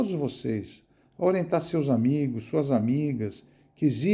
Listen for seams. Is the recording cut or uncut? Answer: uncut